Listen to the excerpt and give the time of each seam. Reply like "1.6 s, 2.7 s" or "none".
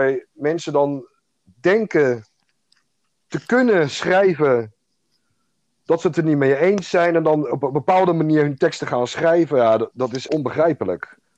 10.3 s